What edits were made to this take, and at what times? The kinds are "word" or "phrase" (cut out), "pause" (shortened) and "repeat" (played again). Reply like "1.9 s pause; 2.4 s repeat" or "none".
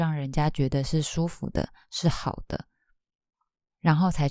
none